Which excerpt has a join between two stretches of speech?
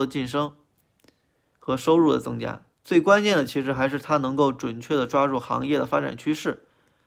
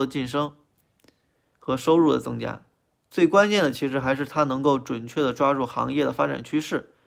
first; 1 cut; at 2.7 s

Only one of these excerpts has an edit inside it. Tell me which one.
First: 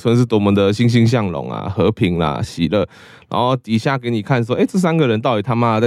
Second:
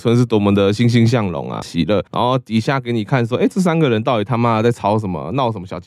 second; 2 cuts; at 1.6 s, 2.1 s

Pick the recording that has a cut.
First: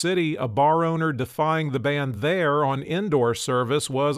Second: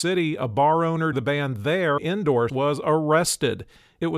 second; 3 cuts; at 1.1 s, 2.0 s, 2.5 s

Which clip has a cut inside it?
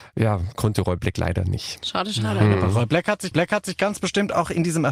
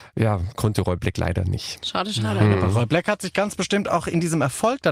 first; 1 cut; at 3.3 s

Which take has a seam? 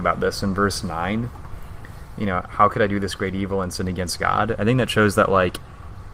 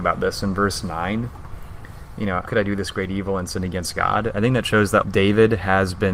second; 2 cuts; at 2.5 s, 5.0 s

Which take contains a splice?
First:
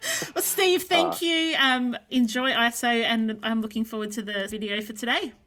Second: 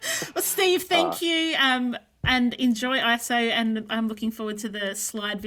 first; 2 cuts; at 2.1 s, 4.5 s

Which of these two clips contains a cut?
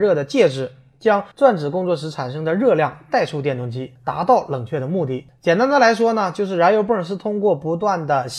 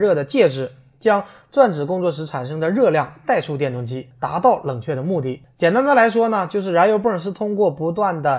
first; 1 cut; at 1.3 s

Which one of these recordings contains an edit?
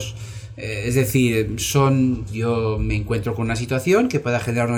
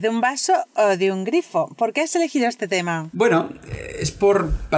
first; 1 cut; at 2.3 s

